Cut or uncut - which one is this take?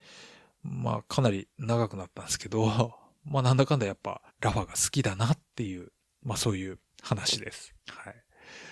cut